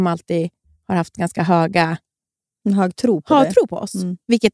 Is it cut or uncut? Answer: uncut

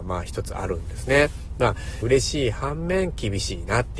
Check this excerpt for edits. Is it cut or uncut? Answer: cut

